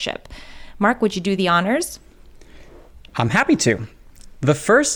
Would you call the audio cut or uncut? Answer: uncut